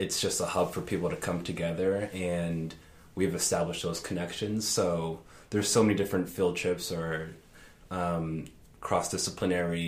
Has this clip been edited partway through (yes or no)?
no